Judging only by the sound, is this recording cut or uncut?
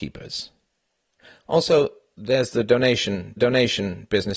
cut